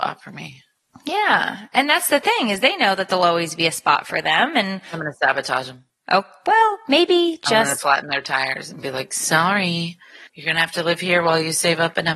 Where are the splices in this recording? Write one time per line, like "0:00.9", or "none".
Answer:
0:10.3